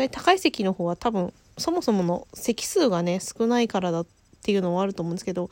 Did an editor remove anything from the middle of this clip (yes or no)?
no